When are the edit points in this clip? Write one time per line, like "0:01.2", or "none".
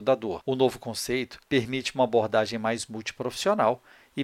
0:01.4